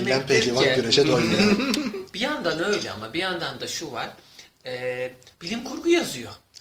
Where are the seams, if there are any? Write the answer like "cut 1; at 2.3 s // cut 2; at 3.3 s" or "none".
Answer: cut 1; at 5.3 s